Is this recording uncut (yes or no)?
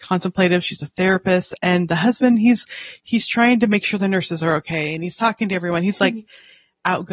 yes